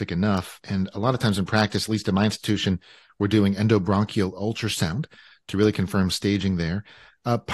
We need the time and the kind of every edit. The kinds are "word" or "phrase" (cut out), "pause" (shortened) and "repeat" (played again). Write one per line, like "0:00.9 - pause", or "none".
none